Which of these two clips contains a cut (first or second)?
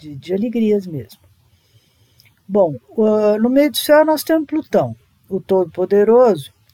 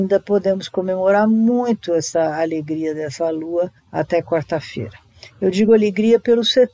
second